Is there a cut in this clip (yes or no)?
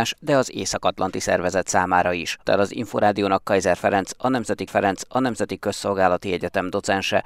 yes